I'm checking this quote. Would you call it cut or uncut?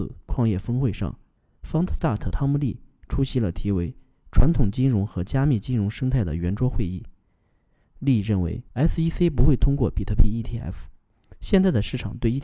cut